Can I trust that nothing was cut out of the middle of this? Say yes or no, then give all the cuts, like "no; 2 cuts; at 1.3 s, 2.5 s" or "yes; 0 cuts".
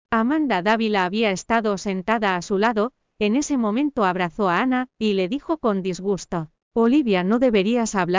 no; 1 cut; at 6.6 s